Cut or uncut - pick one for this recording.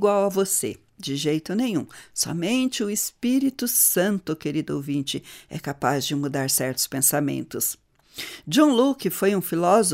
uncut